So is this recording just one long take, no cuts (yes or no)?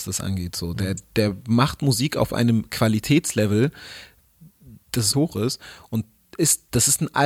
no